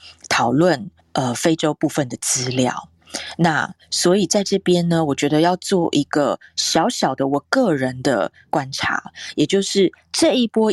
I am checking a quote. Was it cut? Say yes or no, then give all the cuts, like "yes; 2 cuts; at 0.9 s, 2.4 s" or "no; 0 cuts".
yes; 1 cut; at 1.0 s